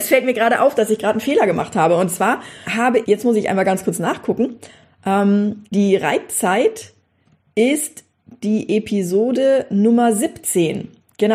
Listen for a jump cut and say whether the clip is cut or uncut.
cut